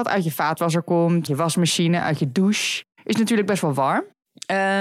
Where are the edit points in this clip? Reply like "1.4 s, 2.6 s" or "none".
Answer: 1.3 s